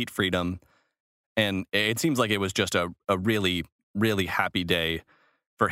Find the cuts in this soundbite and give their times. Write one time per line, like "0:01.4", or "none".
none